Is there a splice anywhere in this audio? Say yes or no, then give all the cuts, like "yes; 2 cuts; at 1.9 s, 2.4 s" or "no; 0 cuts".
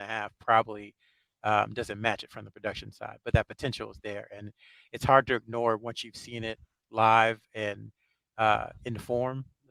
no; 0 cuts